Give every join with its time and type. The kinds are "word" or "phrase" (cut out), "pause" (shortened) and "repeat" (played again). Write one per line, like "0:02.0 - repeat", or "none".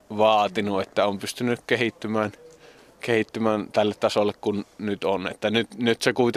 none